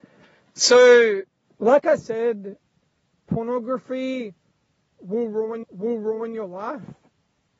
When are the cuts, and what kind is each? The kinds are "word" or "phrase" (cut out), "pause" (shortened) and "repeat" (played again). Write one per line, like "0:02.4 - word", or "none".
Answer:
0:05.6 - repeat